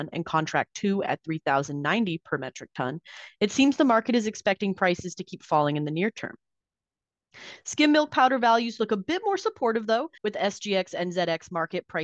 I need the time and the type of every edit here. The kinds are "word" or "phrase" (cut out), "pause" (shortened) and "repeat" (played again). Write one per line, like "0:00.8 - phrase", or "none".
0:10.2 - pause